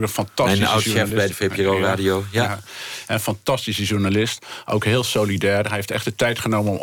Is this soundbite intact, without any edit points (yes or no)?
yes